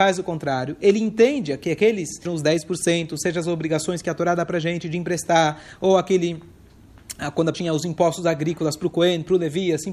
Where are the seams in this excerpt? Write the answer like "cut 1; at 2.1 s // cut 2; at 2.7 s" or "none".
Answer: cut 1; at 2.3 s // cut 2; at 7.5 s